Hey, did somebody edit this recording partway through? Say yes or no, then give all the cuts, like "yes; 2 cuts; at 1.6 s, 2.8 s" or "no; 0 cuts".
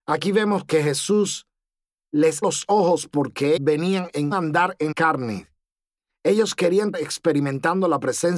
yes; 5 cuts; at 2.4 s, 3.6 s, 4.3 s, 4.9 s, 6.9 s